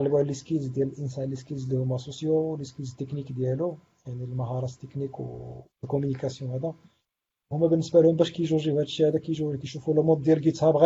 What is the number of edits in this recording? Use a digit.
2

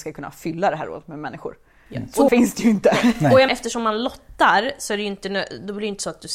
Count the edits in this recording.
2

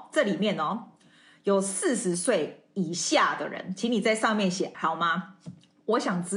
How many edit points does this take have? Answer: 1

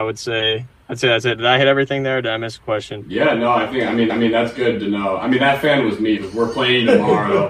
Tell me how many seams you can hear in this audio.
2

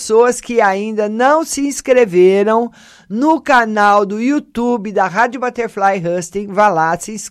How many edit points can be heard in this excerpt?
0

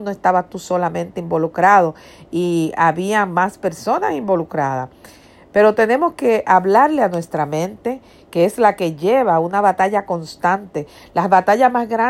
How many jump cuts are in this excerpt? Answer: 0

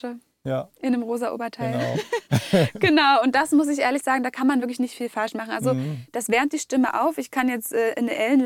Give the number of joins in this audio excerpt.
0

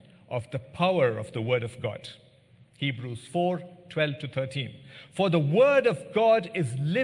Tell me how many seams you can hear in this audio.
0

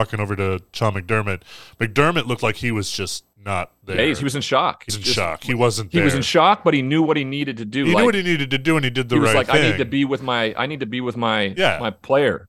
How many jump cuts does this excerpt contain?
2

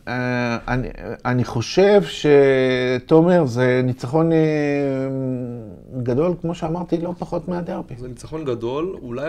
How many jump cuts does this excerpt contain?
0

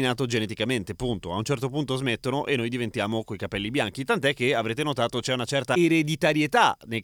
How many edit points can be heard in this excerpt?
0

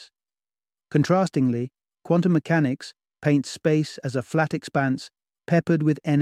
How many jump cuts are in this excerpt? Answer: 0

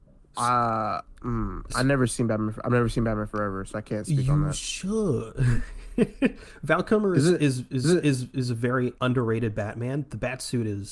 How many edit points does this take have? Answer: 2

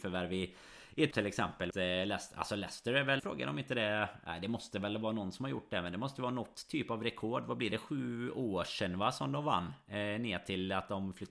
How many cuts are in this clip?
3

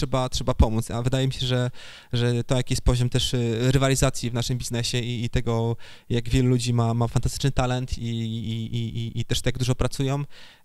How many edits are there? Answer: 0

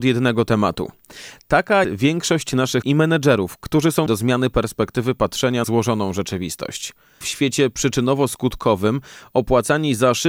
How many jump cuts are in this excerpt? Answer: 5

